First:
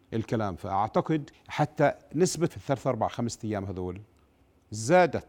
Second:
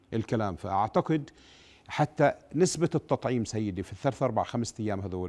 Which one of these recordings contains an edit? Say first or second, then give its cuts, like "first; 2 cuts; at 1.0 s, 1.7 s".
first; 2 cuts; at 1.3 s, 2.5 s